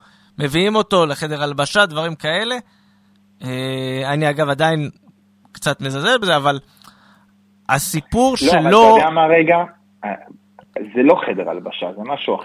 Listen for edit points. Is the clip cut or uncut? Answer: uncut